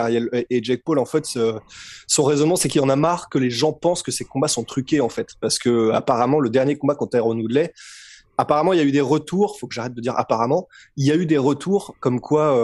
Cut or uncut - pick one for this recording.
uncut